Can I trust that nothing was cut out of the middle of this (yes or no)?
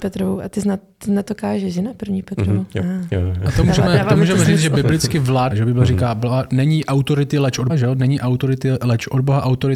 no